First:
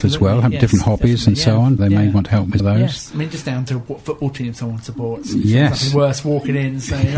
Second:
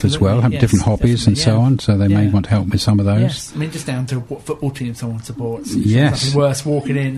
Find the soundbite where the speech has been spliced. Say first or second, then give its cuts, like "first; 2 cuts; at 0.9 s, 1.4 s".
first; 2 cuts; at 1.8 s, 2.6 s